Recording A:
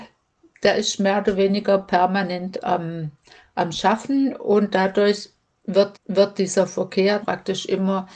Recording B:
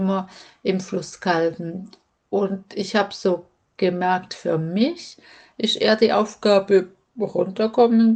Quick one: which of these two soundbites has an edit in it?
A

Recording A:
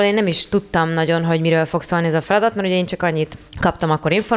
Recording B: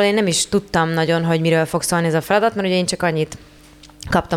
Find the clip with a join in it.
A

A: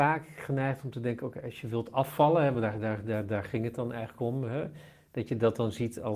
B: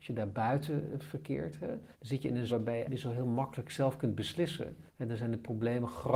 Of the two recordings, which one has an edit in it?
B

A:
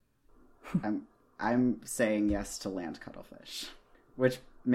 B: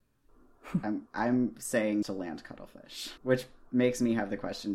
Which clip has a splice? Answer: B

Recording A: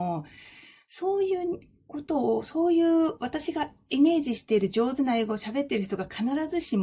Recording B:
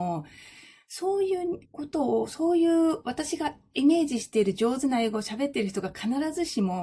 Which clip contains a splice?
B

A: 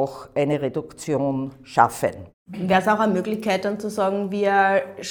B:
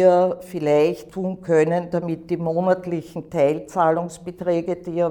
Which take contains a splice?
B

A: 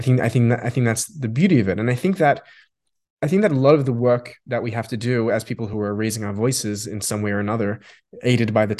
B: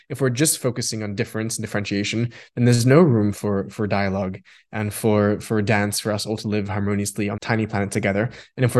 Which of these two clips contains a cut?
B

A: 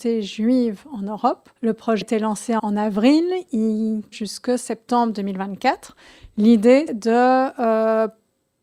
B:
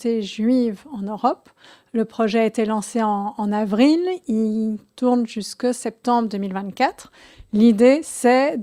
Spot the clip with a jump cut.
A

